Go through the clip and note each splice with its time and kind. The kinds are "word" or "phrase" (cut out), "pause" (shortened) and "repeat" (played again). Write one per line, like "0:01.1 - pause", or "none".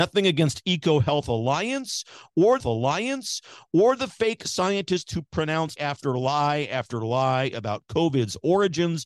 0:02.6 - repeat
0:05.8 - word